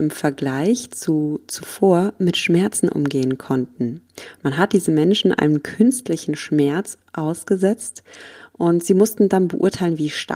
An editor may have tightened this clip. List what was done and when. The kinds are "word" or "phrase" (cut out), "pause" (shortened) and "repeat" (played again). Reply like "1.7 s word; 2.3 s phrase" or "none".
none

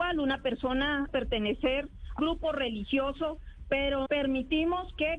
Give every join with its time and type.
1.1 s word; 2.2 s word; 4.1 s word

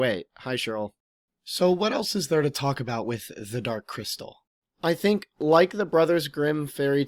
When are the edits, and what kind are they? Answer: none

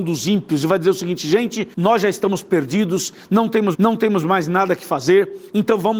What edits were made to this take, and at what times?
1.7 s pause; 3.7 s repeat

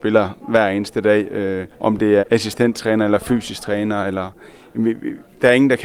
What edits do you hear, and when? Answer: 1.7 s pause; 2.2 s word

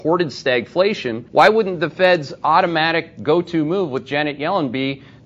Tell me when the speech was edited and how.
1.3 s pause

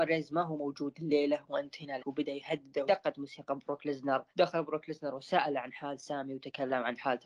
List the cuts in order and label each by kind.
2.0 s word; 2.9 s phrase; 4.3 s pause

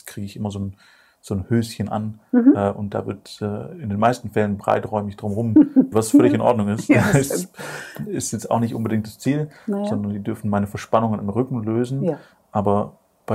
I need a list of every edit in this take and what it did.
5.9 s word

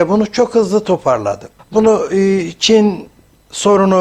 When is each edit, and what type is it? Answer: 1.6 s pause

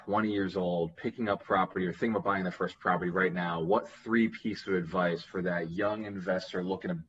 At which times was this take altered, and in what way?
none

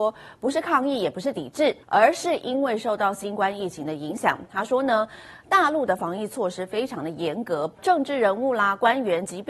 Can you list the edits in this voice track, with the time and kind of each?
1.8 s pause; 7.8 s phrase

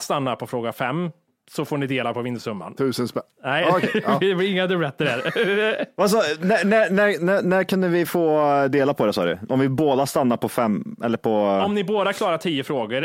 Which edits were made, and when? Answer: none

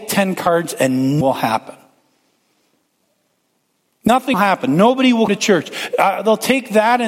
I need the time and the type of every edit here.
1.2 s word; 4.3 s word; 5.3 s word

